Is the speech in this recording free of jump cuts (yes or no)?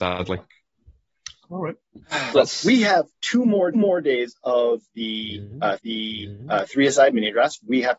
no